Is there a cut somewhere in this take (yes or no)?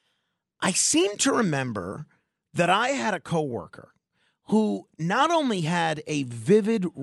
no